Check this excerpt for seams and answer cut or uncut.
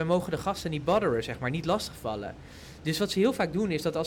uncut